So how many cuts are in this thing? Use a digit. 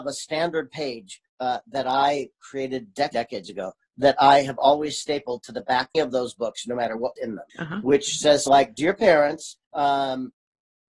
8